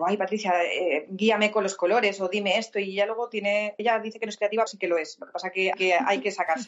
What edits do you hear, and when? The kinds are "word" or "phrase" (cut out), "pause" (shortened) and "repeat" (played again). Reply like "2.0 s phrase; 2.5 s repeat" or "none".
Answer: 3.8 s word; 4.7 s word; 5.7 s word